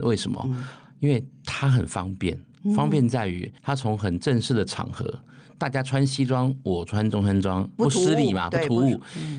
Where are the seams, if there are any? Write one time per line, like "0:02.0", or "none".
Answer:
0:03.6